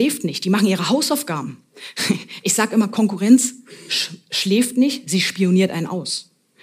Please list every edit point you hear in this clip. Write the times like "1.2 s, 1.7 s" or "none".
none